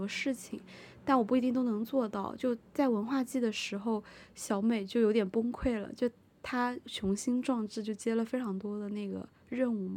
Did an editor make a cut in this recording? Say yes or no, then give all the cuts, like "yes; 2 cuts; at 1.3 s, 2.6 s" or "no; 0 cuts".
no; 0 cuts